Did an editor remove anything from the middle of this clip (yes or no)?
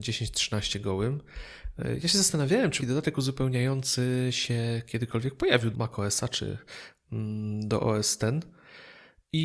yes